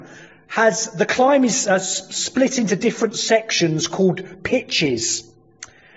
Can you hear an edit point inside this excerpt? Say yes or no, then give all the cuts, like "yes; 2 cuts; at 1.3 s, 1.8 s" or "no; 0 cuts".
no; 0 cuts